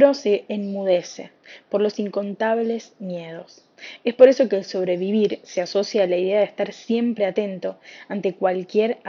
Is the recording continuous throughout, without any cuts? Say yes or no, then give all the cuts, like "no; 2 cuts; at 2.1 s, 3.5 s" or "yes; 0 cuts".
yes; 0 cuts